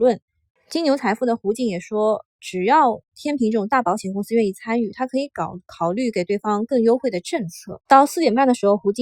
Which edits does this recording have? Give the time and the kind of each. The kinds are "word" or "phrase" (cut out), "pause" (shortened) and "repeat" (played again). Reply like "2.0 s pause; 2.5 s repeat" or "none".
7.9 s pause